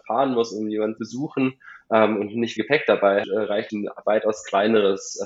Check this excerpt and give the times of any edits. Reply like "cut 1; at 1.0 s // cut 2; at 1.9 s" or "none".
cut 1; at 1.0 s // cut 2; at 2.6 s // cut 3; at 3.2 s // cut 4; at 3.7 s